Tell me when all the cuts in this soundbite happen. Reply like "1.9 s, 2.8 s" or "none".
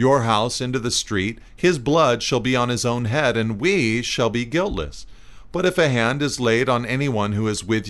1.5 s